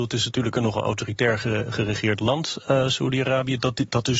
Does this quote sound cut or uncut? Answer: uncut